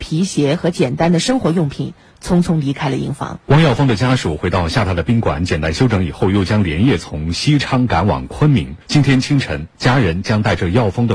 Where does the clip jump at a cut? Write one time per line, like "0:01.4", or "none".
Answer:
0:03.4
0:08.8